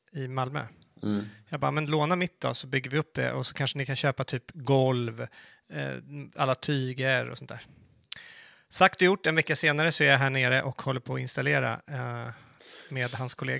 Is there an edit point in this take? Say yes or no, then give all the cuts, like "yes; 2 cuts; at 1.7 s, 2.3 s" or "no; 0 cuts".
no; 0 cuts